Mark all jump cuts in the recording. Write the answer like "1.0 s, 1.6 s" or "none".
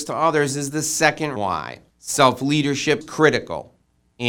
1.4 s, 1.9 s, 3.0 s